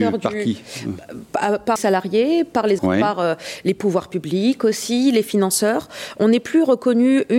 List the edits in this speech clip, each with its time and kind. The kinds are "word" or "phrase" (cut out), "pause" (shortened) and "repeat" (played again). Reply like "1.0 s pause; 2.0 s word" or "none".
1.8 s phrase; 2.8 s word